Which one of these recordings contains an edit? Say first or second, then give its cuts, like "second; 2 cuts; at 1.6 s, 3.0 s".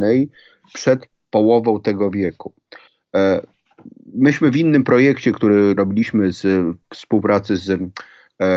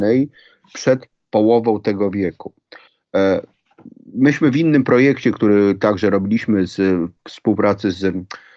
first; 1 cut; at 5.8 s